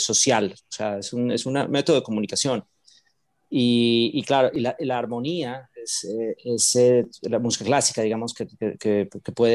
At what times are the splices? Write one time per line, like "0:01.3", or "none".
none